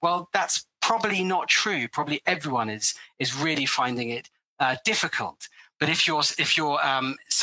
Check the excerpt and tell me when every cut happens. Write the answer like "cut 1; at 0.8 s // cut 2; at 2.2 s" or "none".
none